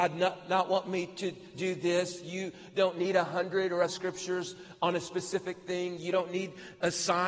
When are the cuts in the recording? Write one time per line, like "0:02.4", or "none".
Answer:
0:01.5
0:03.9